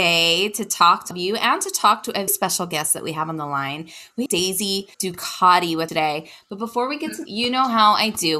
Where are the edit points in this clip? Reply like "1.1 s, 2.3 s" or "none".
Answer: 1.1 s, 2.3 s, 4.3 s, 4.9 s, 5.9 s, 7.3 s